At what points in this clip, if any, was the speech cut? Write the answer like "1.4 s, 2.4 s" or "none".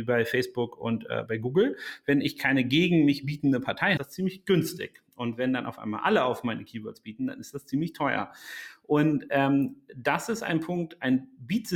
1.3 s, 4.0 s